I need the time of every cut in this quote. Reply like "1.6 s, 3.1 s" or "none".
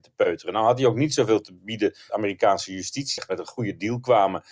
2.1 s, 3.2 s